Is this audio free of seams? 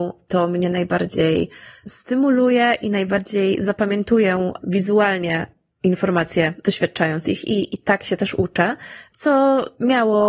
yes; 0 cuts

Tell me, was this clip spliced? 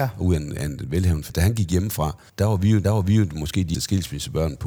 yes; 4 cuts; at 1.3 s, 2.3 s, 2.8 s, 3.7 s

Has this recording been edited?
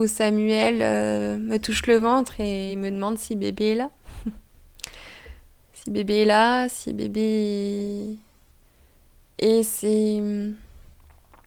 no; 0 cuts

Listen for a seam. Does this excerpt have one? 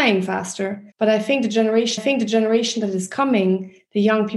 yes; 2 cuts; at 0.9 s, 2.0 s

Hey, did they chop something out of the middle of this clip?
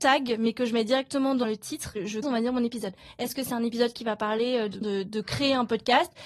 yes; 2 cuts; at 2.2 s, 4.8 s

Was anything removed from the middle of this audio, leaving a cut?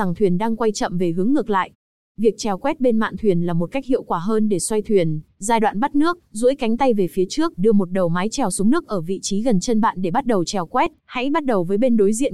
yes; 3 cuts; at 5.3 s, 7.6 s, 11.0 s

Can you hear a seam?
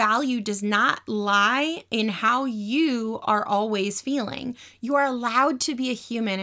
no; 0 cuts

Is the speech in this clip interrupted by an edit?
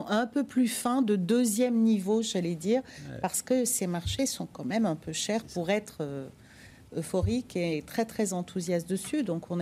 no; 0 cuts

